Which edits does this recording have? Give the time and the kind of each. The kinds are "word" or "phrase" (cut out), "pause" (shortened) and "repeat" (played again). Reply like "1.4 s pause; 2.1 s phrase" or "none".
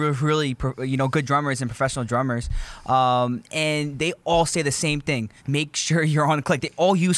5.4 s pause